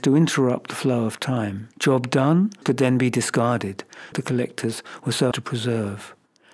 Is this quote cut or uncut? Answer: cut